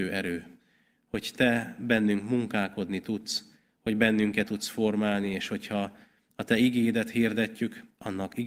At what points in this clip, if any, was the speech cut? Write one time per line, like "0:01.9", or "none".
0:04.4

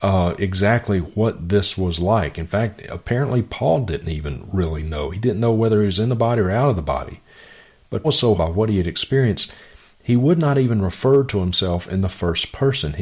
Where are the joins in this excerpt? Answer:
0:08.0
0:08.4

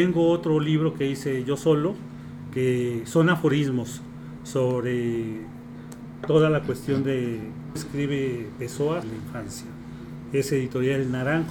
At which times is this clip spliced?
0:07.8
0:09.0

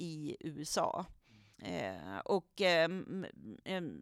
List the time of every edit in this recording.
0:01.5

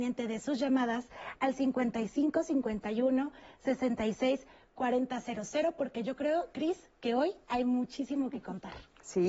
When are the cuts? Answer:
none

